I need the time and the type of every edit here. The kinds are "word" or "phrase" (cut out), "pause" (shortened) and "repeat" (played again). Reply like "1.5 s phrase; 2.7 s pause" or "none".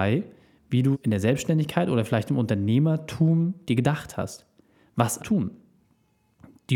0.9 s word; 5.2 s word